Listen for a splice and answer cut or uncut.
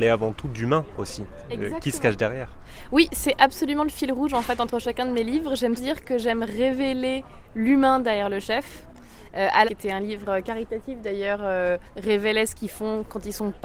cut